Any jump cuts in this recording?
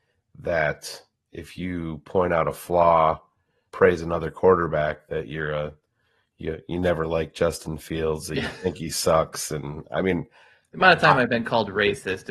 yes; 1 cut; at 3.7 s

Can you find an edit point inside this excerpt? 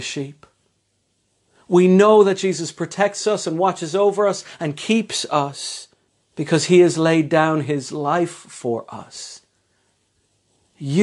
yes; 1 cut; at 6.1 s

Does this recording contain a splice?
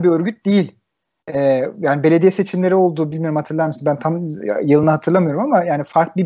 no; 0 cuts

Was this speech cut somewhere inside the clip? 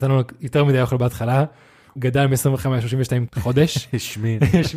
yes; 2 cuts; at 2.0 s, 3.3 s

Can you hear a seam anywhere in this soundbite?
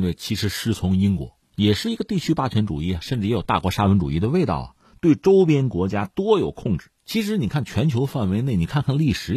yes; 1 cut; at 7.0 s

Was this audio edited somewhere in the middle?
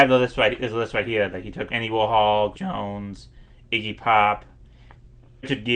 yes; 2 cuts; at 1.7 s, 2.5 s

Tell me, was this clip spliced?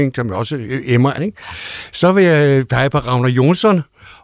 yes; 1 cut; at 1.2 s

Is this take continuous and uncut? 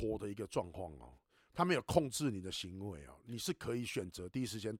yes; 0 cuts

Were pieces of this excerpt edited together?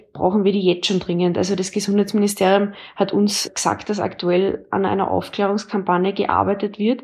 no; 0 cuts

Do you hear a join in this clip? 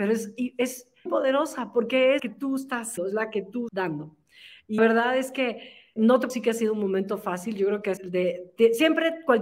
yes; 8 cuts; at 1.1 s, 2.2 s, 3.0 s, 3.7 s, 4.8 s, 6.0 s, 6.3 s, 8.0 s

